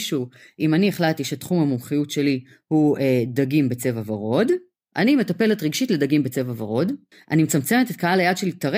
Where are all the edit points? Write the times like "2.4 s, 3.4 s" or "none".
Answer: none